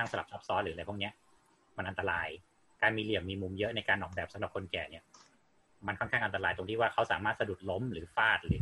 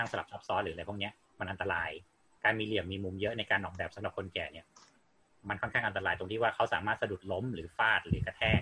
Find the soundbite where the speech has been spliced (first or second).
second